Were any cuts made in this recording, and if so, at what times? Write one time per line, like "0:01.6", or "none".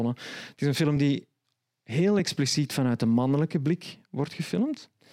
none